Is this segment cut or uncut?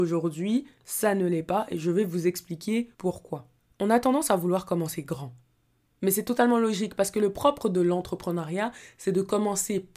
cut